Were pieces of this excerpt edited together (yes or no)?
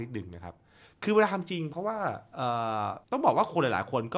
yes